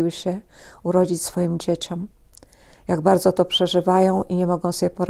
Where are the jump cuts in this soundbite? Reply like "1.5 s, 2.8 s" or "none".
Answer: none